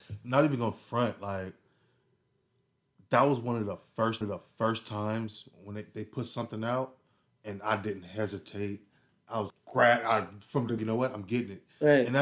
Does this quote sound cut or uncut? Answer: cut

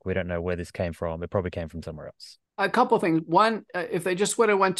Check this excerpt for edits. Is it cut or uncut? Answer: cut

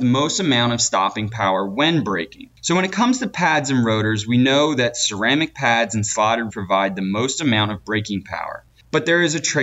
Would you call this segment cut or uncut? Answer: cut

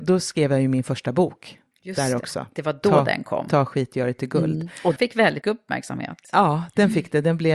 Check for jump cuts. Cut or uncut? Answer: cut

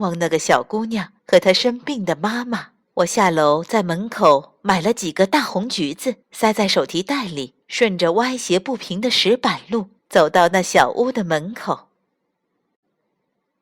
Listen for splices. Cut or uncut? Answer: cut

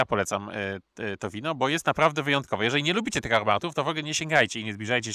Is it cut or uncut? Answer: uncut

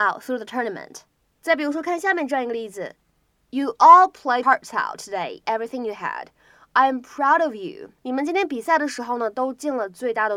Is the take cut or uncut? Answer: cut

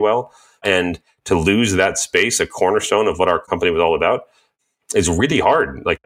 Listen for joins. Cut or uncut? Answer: uncut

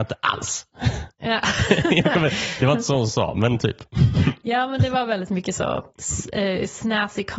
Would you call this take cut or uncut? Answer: uncut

